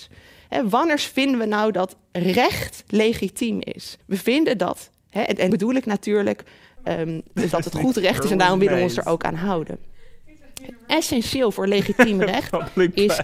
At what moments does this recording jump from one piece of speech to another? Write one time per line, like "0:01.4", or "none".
0:04.0
0:05.5
0:07.5